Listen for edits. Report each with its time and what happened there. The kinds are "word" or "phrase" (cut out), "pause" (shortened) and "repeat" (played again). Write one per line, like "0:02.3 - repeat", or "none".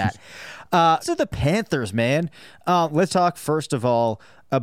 0:01.0 - word
0:03.1 - word

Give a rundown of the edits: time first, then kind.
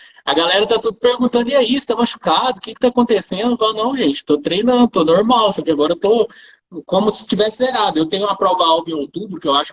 none

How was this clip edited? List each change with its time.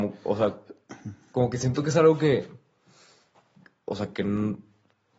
none

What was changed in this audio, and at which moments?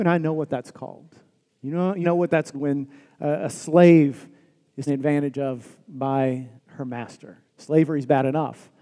0:01.5 - pause
0:02.0 - phrase
0:02.5 - word
0:04.9 - word
0:06.6 - pause
0:07.5 - pause

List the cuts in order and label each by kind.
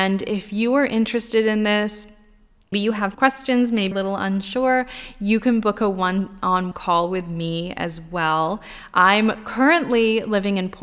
0:02.7 - word
0:03.1 - word
0:03.9 - phrase
0:06.7 - word

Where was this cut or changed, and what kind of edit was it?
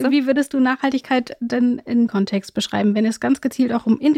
0:02.1 - word

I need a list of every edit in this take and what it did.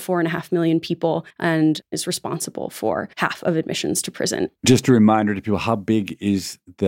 0:01.3 - pause
0:03.1 - pause

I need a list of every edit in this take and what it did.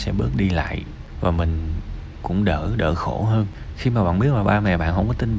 0:02.2 - word

